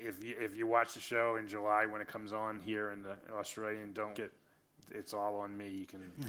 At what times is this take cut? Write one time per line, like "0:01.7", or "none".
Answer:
0:04.1